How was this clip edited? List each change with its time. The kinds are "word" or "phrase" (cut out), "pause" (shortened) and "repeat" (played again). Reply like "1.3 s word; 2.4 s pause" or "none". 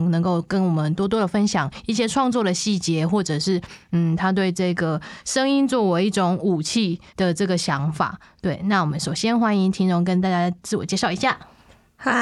7.1 s pause

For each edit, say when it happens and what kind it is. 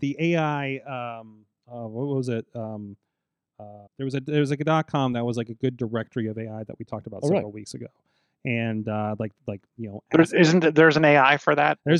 3.9 s pause

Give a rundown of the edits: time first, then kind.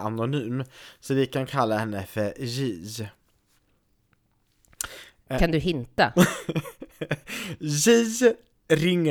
none

